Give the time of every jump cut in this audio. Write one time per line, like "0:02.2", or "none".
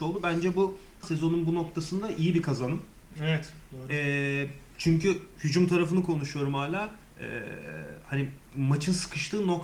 0:01.0
0:07.1